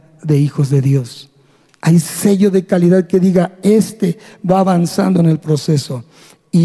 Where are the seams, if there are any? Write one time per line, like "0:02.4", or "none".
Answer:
none